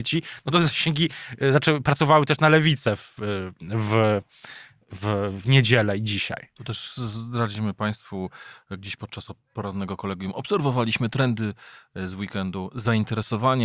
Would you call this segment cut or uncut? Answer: uncut